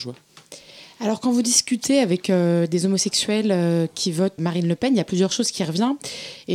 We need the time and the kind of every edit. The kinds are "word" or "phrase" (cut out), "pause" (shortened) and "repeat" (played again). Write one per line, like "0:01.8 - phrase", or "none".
0:04.4 - word